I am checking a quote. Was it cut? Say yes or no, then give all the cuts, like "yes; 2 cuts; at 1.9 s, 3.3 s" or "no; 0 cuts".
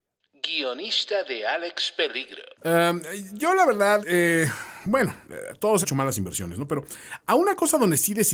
yes; 4 cuts; at 2.5 s, 4.0 s, 5.2 s, 5.8 s